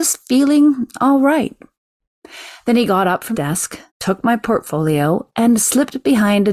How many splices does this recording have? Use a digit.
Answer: 2